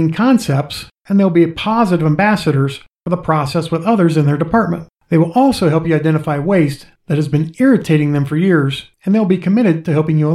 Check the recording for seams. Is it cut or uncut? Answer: uncut